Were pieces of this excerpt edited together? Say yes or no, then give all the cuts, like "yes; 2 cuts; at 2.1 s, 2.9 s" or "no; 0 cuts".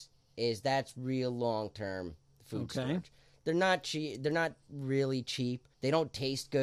yes; 1 cut; at 5.7 s